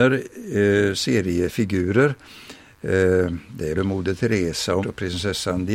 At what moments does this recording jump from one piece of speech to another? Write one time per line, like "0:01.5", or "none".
0:00.9
0:03.7
0:04.8